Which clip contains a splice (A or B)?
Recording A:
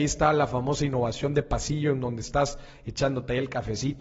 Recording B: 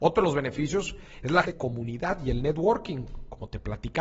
B